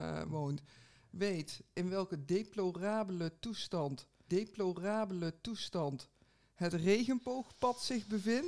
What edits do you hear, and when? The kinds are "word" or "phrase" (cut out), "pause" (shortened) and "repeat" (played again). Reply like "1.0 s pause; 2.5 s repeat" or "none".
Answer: 4.3 s repeat